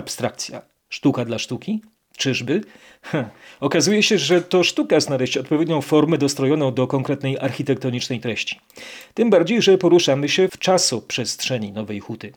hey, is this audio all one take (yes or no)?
yes